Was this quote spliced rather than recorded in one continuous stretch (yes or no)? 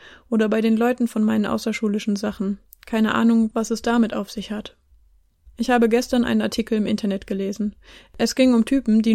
no